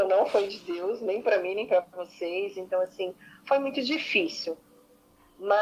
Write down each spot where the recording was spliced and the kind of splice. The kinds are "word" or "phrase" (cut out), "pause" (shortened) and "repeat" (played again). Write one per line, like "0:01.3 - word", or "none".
none